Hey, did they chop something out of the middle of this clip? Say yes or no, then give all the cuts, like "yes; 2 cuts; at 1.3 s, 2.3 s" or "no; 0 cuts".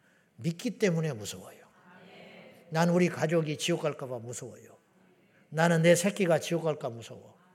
no; 0 cuts